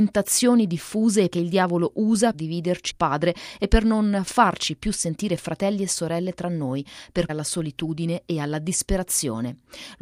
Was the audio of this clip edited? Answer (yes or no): yes